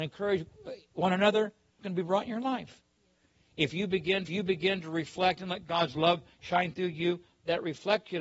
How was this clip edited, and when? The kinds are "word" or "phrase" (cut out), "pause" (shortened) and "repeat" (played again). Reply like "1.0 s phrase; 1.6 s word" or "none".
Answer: 1.8 s word; 4.3 s repeat